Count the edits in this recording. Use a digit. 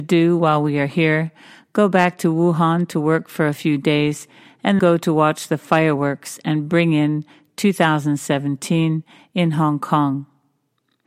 1